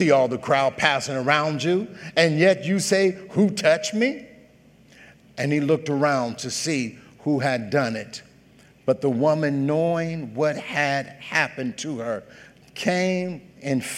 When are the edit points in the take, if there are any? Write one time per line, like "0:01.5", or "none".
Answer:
none